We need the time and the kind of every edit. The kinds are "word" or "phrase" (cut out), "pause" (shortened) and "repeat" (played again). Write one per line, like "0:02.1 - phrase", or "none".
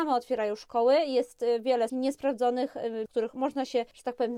0:01.9 - word
0:03.1 - word